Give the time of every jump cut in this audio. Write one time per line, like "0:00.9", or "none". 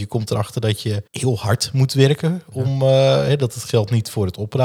0:01.1